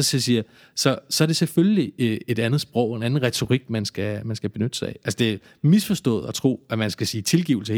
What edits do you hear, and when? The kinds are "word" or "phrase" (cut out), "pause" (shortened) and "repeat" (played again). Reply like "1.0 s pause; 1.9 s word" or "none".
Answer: none